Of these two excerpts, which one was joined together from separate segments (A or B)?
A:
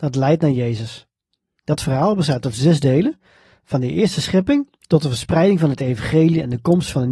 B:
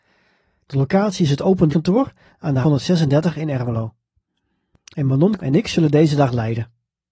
B